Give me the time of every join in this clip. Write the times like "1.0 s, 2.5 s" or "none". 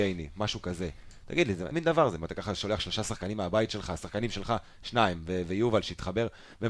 1.7 s